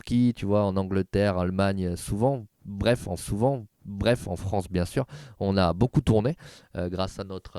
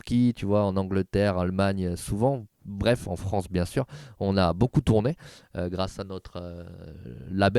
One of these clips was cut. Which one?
first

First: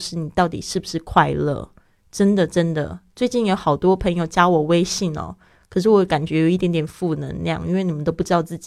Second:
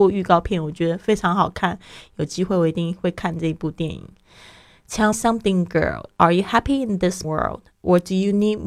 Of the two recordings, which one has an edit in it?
second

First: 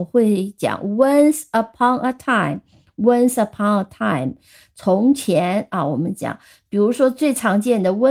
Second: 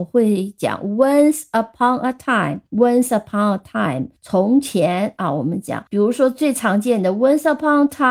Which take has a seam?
second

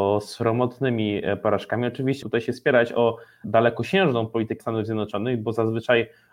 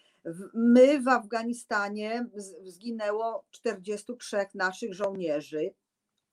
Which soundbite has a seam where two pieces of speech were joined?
first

